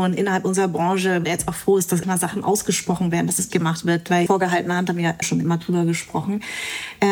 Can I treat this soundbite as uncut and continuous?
no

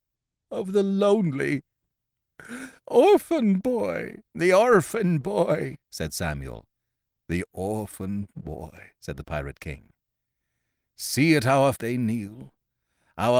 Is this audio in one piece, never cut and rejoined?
no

